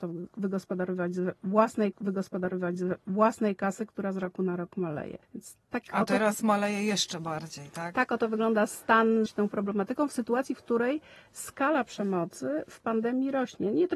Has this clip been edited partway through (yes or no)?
yes